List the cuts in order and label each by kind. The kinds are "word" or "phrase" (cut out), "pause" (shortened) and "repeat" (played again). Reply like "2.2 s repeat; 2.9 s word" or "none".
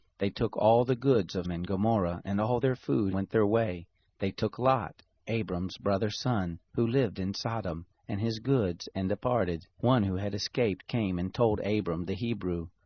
1.4 s word; 3.1 s word; 4.0 s pause; 6.6 s pause; 9.7 s pause